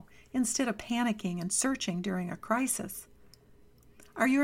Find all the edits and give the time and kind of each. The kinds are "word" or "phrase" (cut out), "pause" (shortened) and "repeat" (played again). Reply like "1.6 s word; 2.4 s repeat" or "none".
none